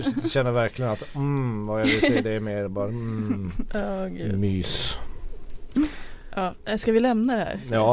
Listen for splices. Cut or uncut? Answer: uncut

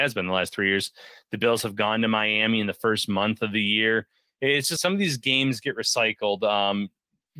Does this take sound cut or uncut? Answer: cut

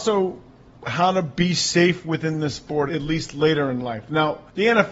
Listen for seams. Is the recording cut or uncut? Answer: cut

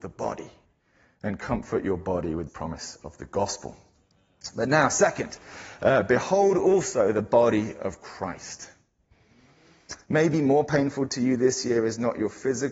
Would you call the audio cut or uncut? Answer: cut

